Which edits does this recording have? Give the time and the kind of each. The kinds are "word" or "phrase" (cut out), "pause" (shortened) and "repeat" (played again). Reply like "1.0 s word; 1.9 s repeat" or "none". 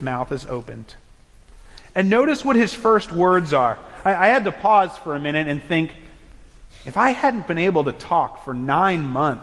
none